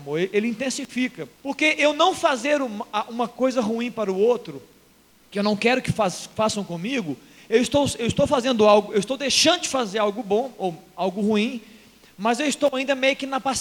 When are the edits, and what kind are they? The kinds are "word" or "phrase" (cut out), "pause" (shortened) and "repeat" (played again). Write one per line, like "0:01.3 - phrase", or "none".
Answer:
0:01.3 - pause